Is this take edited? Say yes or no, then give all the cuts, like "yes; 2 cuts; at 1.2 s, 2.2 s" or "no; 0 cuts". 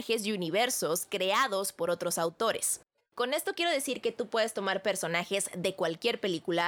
no; 0 cuts